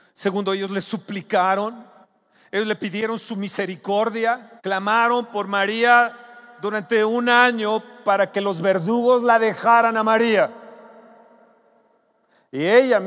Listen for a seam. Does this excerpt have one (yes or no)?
yes